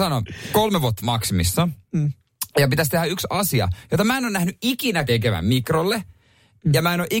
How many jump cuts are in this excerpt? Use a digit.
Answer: 2